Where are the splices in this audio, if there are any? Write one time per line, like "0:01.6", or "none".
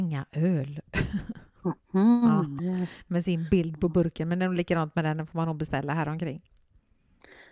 0:02.6

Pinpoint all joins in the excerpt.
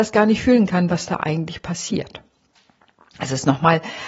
none

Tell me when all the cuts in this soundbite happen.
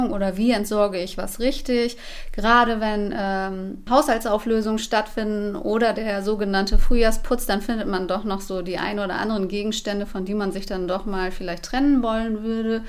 none

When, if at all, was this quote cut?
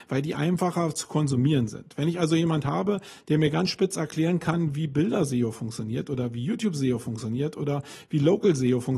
none

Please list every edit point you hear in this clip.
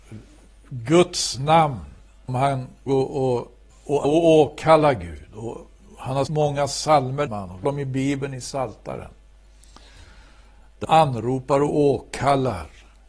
0:02.3
0:02.9
0:03.7
0:04.0
0:06.3
0:07.3
0:07.6
0:10.8

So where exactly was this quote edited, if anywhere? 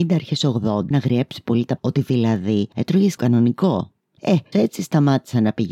0:00.9
0:01.8
0:03.2
0:04.5

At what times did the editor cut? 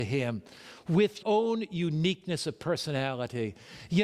0:01.2

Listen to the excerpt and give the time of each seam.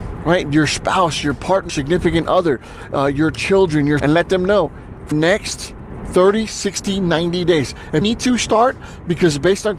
0:01.7
0:04.0
0:05.1
0:08.0

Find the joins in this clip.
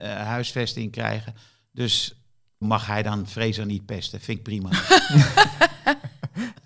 0:02.6

